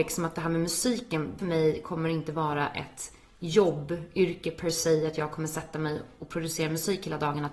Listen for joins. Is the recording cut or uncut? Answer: cut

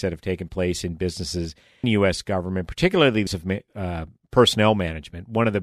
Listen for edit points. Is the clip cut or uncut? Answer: cut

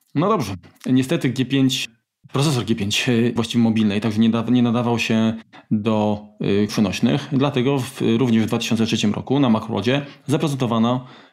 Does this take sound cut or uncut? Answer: cut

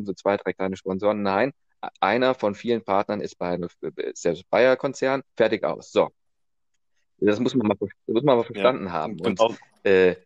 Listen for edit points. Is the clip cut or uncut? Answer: cut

